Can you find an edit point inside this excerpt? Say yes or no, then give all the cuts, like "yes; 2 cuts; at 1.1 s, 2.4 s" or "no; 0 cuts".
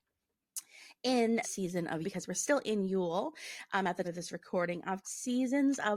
yes; 4 cuts; at 1.4 s, 2.0 s, 4.0 s, 5.0 s